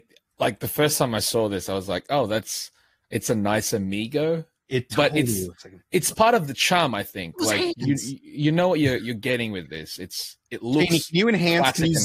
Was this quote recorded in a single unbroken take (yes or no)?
yes